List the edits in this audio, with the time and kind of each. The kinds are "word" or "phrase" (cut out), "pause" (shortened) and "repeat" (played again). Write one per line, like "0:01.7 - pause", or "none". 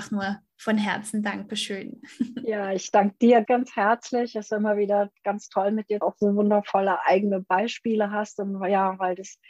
0:03.5 - word
0:06.0 - phrase